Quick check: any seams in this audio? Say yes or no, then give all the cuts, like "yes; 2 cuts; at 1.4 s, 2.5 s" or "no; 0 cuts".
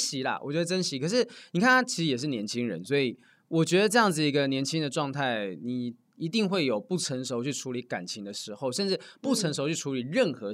no; 0 cuts